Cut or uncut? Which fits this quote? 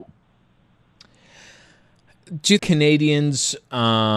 cut